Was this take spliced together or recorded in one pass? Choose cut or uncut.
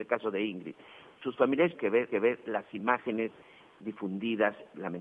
cut